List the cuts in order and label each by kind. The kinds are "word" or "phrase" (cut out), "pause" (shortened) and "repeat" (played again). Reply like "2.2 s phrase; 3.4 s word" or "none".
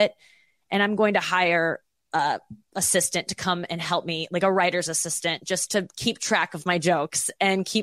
none